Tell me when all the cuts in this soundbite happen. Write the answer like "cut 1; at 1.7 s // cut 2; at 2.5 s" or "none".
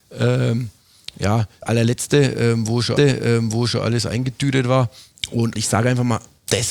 cut 1; at 1.6 s // cut 2; at 3.0 s // cut 3; at 5.6 s

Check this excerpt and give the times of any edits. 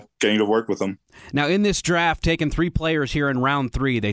cut 1; at 2.2 s

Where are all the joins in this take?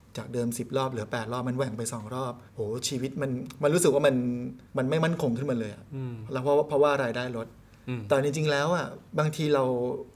cut 1; at 2.5 s // cut 2; at 4.7 s // cut 3; at 9.1 s

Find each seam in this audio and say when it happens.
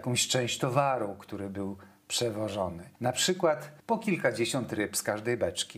cut 1; at 3.8 s

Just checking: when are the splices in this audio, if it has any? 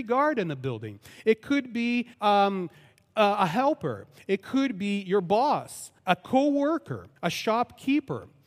cut 1; at 2.1 s // cut 2; at 6.0 s // cut 3; at 7.2 s

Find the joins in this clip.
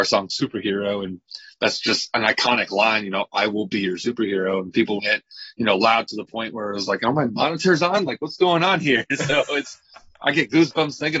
cut 1; at 5.0 s

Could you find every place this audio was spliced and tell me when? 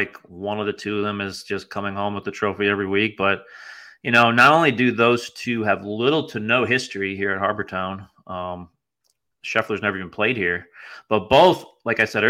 none

